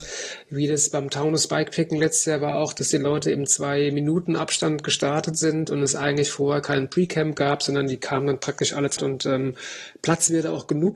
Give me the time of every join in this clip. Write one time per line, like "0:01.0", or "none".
0:09.0